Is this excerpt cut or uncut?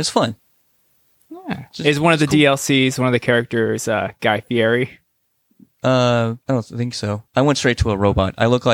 cut